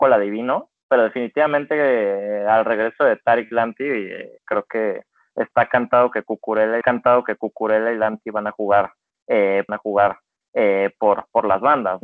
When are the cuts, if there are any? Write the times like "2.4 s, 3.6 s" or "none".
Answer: 4.4 s, 6.8 s, 9.7 s